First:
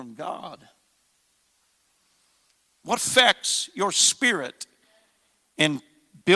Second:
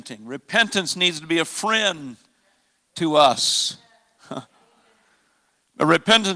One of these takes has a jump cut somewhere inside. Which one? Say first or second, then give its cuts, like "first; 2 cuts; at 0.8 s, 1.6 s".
first; 1 cut; at 3.0 s